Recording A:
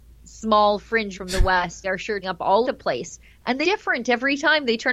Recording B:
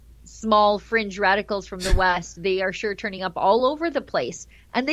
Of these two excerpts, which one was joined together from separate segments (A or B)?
A